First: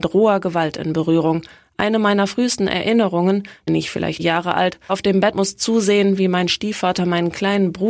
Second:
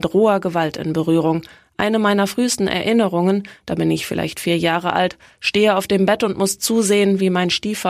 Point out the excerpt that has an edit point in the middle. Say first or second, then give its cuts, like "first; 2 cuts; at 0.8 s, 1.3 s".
first; 4 cuts; at 3.7 s, 4.2 s, 4.9 s, 5.3 s